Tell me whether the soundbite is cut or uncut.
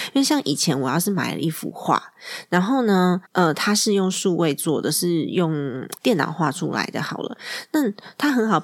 cut